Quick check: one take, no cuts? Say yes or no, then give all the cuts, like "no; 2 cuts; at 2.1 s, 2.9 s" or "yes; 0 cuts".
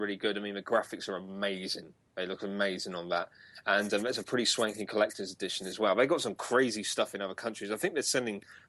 yes; 0 cuts